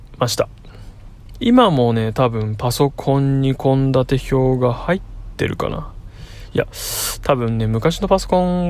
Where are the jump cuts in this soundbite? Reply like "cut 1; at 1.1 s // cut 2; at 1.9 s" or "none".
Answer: none